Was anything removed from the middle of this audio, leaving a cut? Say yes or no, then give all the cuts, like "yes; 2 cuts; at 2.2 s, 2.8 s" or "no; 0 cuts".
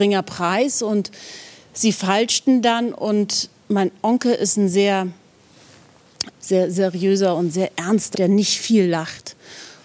yes; 2 cuts; at 6.3 s, 8.1 s